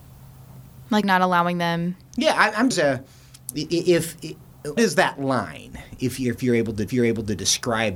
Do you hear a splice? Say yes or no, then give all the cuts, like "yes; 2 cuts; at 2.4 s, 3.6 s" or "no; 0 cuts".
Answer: yes; 4 cuts; at 1.0 s, 2.7 s, 4.8 s, 6.9 s